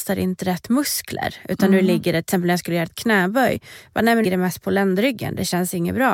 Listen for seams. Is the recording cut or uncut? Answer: cut